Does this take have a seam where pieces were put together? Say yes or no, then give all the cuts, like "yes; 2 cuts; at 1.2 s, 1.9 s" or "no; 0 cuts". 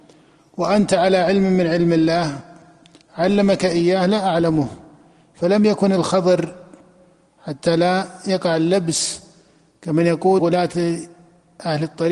yes; 1 cut; at 10.4 s